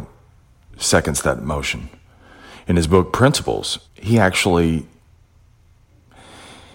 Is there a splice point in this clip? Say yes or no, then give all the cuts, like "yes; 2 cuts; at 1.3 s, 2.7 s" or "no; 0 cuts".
yes; 1 cut; at 3.8 s